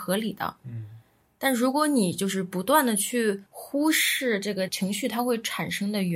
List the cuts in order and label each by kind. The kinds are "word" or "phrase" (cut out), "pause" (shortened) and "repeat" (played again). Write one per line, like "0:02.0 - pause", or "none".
0:03.5 - pause